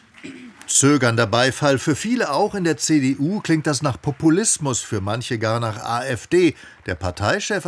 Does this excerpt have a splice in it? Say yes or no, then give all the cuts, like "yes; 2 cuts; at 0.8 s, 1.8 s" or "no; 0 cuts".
no; 0 cuts